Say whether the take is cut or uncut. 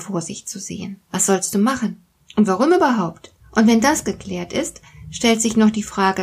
cut